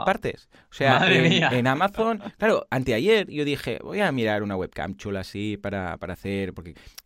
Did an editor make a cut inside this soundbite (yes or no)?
no